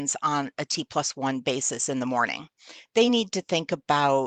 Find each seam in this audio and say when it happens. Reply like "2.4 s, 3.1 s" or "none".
none